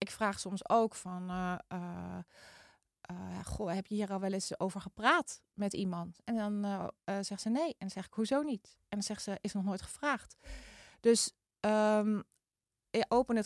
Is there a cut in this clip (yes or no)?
no